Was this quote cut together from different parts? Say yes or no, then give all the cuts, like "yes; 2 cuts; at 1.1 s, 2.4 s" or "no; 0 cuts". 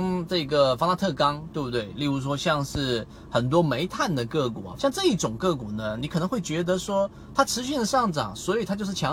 yes; 1 cut; at 4.8 s